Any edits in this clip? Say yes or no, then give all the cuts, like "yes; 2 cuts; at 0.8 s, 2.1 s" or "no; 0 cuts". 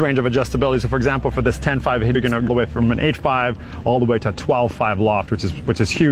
yes; 2 cuts; at 2.1 s, 2.5 s